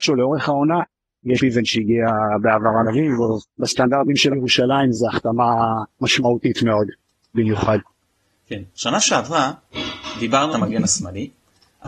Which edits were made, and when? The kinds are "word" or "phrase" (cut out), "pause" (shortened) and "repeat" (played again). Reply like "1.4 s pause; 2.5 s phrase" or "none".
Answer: 1.4 s word; 2.8 s phrase; 3.5 s pause; 4.3 s word; 4.9 s word; 5.9 s pause; 7.3 s word; 10.5 s phrase